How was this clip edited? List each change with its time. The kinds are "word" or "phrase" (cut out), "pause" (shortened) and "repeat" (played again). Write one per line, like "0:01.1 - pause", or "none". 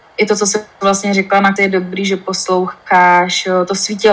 0:01.6 - word